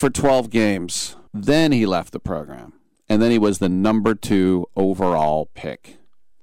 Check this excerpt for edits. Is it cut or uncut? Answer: cut